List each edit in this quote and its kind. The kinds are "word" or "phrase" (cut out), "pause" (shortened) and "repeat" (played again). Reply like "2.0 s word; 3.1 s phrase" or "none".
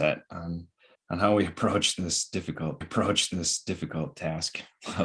0.9 s pause; 2.8 s repeat